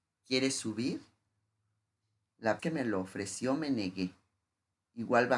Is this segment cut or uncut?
cut